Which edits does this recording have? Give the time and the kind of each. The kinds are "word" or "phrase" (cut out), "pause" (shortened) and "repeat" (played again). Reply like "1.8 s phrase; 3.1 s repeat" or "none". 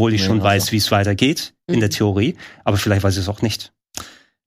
none